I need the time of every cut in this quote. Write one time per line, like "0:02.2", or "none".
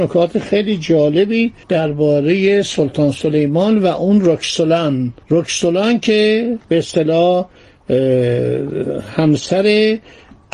0:01.6
0:05.2